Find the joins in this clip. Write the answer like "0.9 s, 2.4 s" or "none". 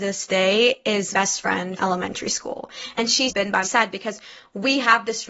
1.1 s, 1.8 s, 3.3 s, 3.6 s